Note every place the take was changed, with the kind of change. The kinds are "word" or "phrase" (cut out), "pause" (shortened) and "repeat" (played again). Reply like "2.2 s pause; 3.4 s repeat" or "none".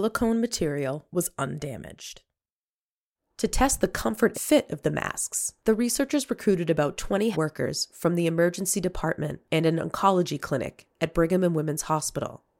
4.3 s word; 7.3 s word

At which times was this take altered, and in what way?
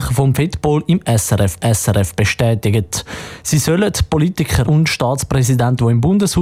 1.6 s repeat; 4.6 s word

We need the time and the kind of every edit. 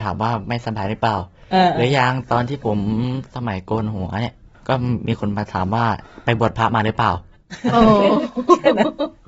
4.5 s pause

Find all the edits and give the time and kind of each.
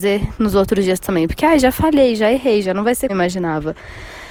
3.1 s word

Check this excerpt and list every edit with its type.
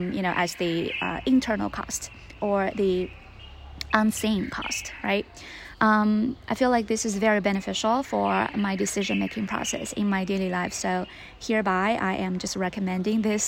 none

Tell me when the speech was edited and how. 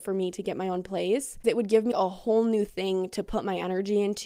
1.4 s word; 1.9 s word

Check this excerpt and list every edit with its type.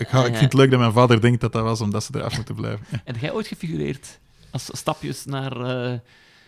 none

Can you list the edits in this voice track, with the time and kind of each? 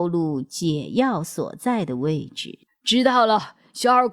2.6 s pause

